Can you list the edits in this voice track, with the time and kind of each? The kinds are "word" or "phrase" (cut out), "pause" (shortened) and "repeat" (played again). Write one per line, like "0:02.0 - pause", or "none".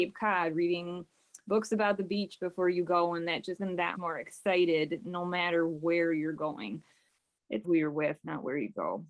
0:03.6 - word
0:03.9 - word
0:07.6 - word